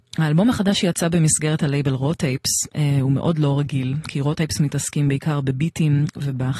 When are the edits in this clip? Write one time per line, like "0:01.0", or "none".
none